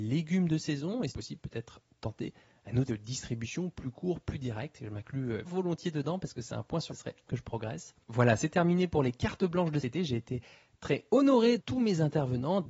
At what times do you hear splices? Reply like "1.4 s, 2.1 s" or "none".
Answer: 1.1 s, 2.9 s, 5.4 s, 6.9 s, 7.3 s, 9.8 s, 11.6 s